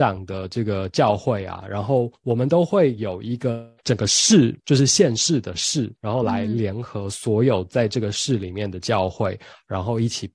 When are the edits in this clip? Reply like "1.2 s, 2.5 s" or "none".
3.8 s, 4.6 s, 6.0 s